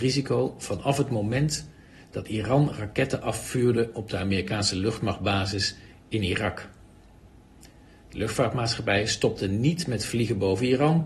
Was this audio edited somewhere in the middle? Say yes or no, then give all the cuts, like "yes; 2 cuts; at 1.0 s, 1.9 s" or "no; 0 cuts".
no; 0 cuts